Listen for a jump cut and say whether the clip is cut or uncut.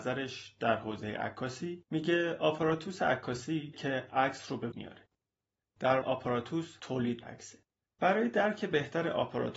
cut